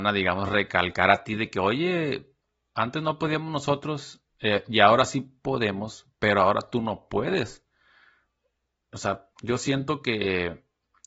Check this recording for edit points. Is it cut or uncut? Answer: cut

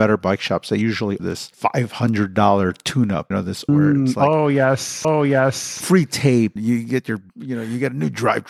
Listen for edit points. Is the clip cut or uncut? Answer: cut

